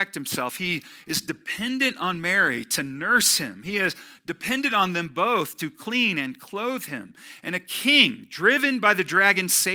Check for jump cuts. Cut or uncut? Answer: uncut